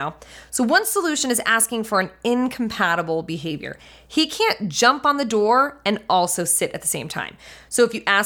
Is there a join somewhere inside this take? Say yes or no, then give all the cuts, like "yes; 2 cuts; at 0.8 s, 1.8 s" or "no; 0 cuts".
no; 0 cuts